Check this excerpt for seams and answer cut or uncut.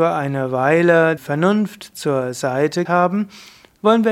cut